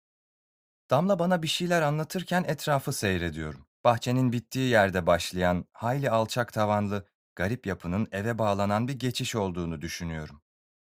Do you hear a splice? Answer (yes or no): yes